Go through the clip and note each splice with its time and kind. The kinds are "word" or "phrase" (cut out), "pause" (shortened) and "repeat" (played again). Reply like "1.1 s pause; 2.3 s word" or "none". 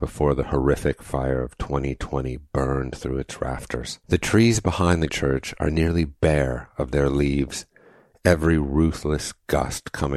4.0 s pause; 5.1 s word